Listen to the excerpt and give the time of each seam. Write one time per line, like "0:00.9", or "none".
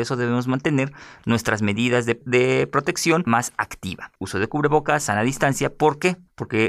0:03.3